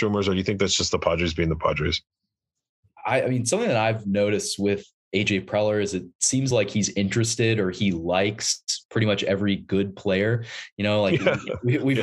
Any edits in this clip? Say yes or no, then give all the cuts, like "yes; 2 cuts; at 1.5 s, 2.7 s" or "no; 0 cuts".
no; 0 cuts